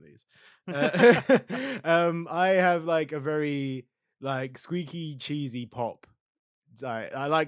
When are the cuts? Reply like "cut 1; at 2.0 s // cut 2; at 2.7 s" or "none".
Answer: none